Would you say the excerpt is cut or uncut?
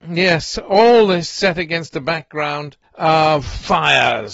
cut